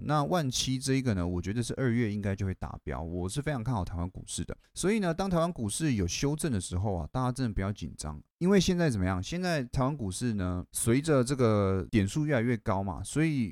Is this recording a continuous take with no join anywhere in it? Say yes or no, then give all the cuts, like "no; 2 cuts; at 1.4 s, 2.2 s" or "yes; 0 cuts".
yes; 0 cuts